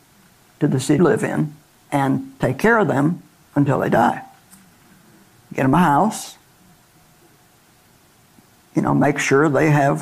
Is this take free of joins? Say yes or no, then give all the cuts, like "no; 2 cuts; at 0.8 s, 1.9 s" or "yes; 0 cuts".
no; 3 cuts; at 1.0 s, 1.7 s, 3.4 s